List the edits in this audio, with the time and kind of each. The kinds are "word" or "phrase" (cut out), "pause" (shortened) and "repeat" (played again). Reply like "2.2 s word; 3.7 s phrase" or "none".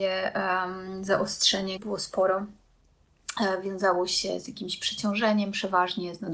1.8 s word

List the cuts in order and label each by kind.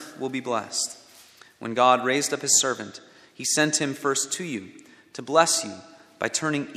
none

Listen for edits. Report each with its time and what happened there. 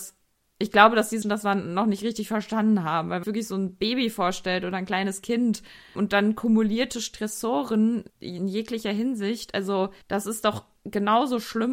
1.2 s word; 3.2 s phrase; 6.0 s word; 8.1 s pause; 10.0 s pause; 10.8 s pause

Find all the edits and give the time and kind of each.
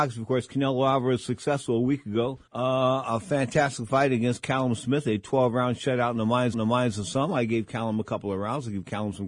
2.5 s pause; 6.5 s repeat

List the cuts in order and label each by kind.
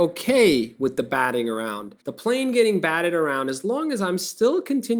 2.0 s pause

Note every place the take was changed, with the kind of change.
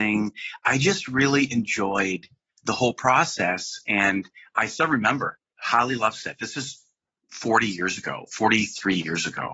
none

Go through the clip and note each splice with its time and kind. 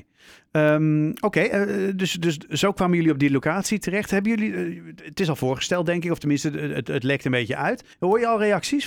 7.9 s pause

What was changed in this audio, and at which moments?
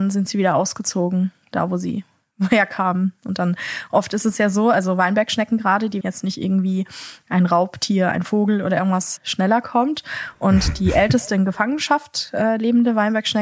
6.0 s phrase; 9.2 s word

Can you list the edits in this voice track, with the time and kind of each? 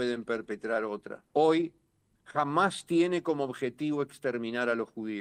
1.3 s pause

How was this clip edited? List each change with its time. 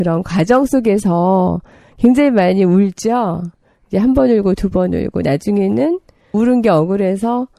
6.3 s word

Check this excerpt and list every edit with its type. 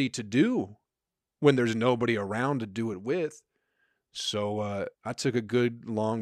4.9 s pause

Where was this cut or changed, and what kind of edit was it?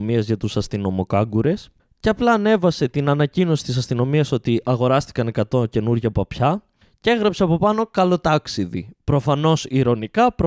none

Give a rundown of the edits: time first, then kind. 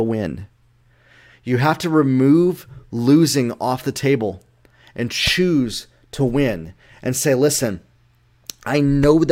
none

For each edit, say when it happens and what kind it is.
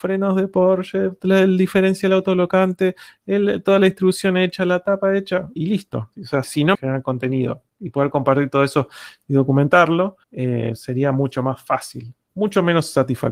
5.6 s word; 6.1 s pause; 6.4 s word; 6.7 s phrase; 10.2 s pause

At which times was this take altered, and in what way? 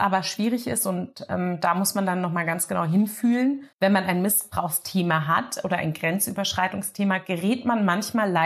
3.7 s pause

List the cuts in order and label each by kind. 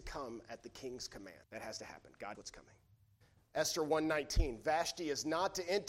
1.4 s pause; 2.3 s word

